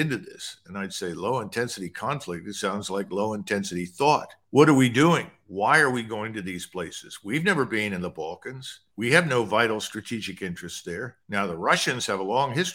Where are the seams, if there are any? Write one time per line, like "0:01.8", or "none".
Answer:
0:04.4
0:08.9
0:11.2

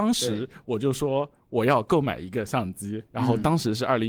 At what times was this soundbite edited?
0:03.1

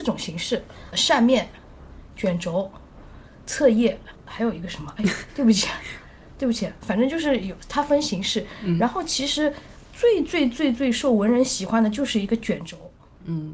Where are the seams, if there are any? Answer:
0:00.9

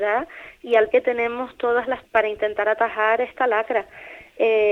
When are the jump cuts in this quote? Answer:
0:00.9
0:02.0

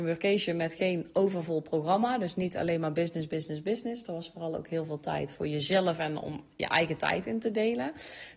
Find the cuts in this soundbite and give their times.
none

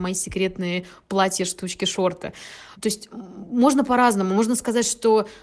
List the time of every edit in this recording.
0:02.8

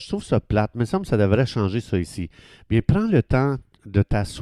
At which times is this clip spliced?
none

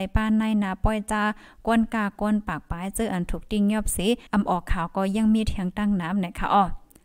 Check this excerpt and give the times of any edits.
0:04.3

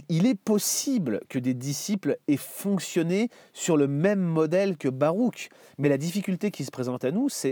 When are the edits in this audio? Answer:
none

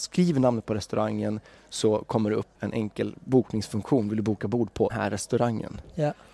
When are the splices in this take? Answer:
0:02.5
0:04.9

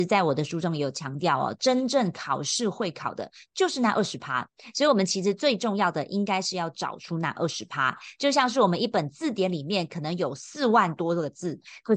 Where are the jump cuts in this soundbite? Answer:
none

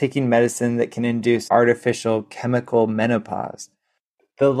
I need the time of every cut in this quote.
0:01.5

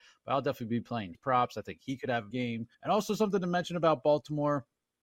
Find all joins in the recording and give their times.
0:01.1
0:02.3
0:02.7

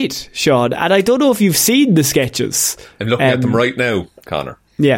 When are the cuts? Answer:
none

